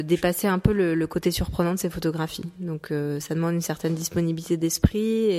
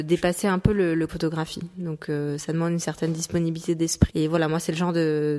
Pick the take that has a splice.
second; 2 cuts; at 1.1 s, 4.1 s

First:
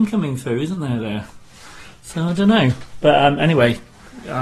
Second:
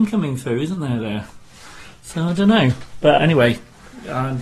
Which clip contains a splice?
second; 1 cut; at 3.2 s

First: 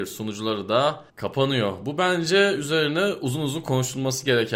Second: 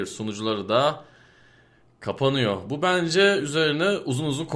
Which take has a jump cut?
first; 1 cut; at 1.1 s

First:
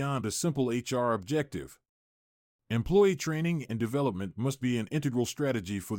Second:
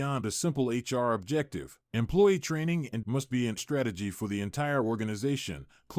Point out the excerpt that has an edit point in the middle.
second; 3 cuts; at 1.8 s, 3.0 s, 3.6 s

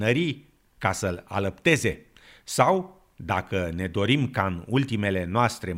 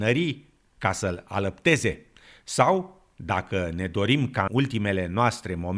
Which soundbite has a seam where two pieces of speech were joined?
second; 1 cut; at 4.5 s

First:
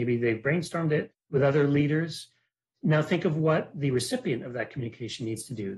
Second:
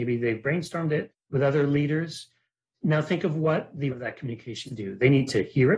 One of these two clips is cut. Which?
second; 2 cuts; at 3.9 s, 4.7 s

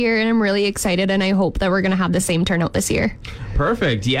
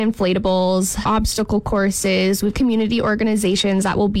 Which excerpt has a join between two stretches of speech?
second; 2 cuts; at 1.0 s, 2.5 s

